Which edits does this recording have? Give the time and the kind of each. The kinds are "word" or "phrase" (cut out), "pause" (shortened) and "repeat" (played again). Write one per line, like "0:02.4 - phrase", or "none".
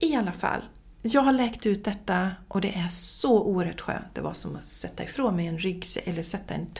0:00.9 - pause